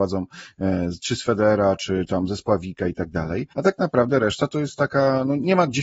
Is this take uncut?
no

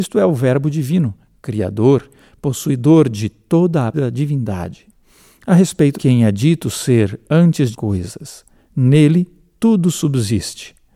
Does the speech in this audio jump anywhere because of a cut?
yes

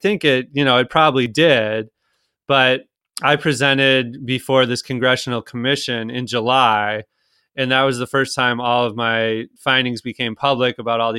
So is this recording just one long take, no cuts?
yes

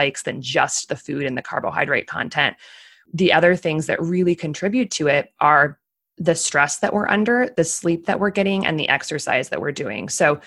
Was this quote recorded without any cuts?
yes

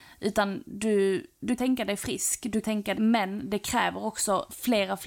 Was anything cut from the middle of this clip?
yes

